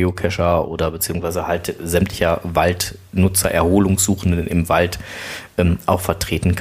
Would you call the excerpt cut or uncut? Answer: uncut